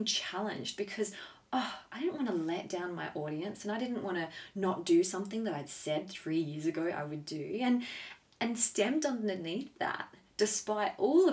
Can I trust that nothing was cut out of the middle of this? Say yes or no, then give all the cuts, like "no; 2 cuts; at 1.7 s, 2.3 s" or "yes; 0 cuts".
yes; 0 cuts